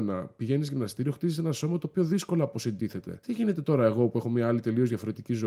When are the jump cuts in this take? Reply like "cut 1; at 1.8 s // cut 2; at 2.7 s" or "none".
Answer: none